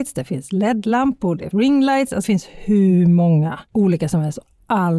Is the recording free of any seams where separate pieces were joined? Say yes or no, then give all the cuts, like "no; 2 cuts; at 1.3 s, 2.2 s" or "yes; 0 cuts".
no; 3 cuts; at 1.5 s, 2.2 s, 3.7 s